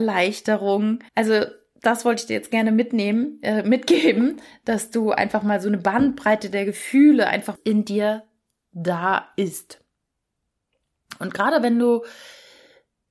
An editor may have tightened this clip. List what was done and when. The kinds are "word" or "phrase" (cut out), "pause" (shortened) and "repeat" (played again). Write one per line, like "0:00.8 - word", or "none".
0:01.1 - pause
0:07.5 - phrase